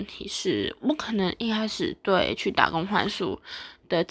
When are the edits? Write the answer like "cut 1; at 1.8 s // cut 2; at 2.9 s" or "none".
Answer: none